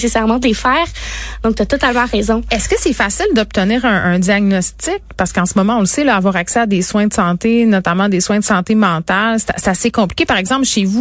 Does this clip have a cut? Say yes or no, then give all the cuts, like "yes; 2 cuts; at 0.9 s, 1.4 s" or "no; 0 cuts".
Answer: no; 0 cuts